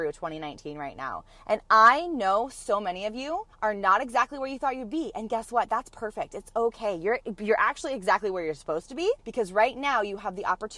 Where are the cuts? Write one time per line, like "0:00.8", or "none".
0:03.5
0:09.2